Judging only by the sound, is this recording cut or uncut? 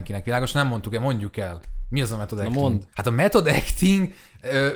cut